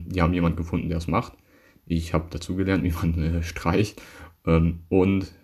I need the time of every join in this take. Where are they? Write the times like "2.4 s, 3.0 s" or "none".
none